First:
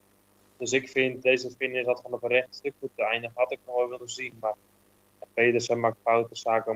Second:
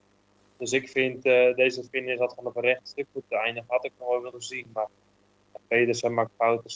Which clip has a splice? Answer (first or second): first